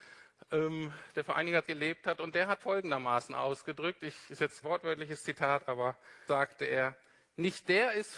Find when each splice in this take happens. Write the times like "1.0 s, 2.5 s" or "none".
1.6 s, 2.6 s, 4.6 s, 6.3 s